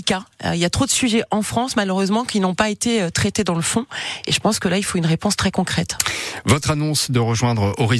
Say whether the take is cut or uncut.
uncut